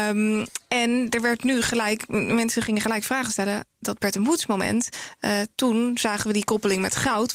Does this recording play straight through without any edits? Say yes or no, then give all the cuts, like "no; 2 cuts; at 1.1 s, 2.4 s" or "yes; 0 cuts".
yes; 0 cuts